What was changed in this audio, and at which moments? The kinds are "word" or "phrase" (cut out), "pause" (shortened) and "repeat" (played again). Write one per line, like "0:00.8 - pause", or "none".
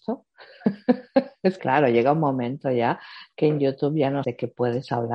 0:01.6 - word
0:04.2 - word